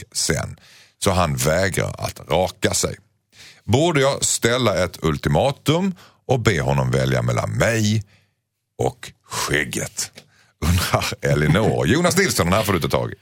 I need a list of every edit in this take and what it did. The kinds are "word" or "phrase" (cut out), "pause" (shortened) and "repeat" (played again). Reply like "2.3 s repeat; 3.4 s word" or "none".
none